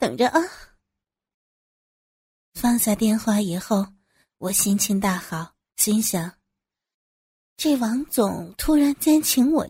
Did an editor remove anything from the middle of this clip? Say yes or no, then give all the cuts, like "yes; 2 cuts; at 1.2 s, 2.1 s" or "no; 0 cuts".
yes; 1 cut; at 5.6 s